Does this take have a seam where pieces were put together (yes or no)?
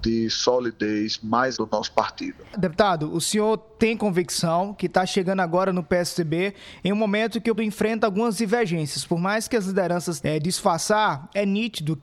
yes